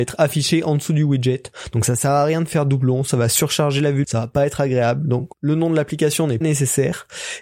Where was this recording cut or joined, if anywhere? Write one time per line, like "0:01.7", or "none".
0:04.0
0:05.3
0:06.4

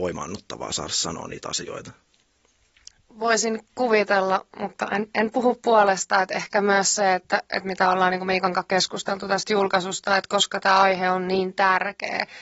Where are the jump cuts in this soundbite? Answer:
none

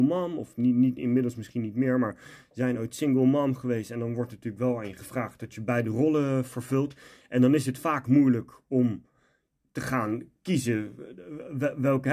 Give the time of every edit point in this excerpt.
none

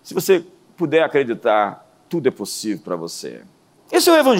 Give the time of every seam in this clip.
none

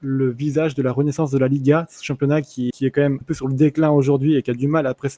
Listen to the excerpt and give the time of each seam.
0:02.7
0:03.2

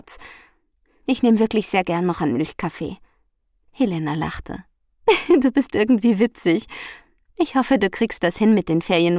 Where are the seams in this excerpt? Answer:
0:03.4

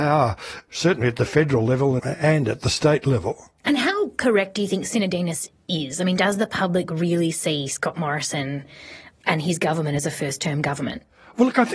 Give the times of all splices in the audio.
0:02.0

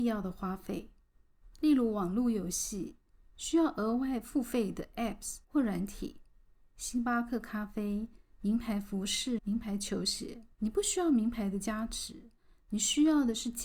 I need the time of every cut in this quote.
0:05.4
0:09.4
0:10.5

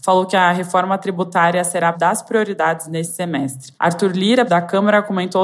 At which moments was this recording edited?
0:01.9
0:03.8
0:04.5

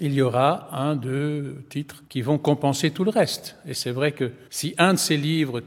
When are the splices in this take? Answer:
0:02.1
0:04.5

